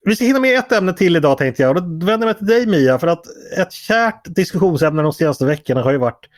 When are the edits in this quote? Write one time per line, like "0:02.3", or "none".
none